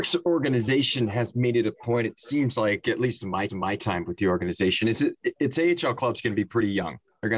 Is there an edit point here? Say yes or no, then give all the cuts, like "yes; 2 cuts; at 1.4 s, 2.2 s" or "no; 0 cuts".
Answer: yes; 1 cut; at 3.5 s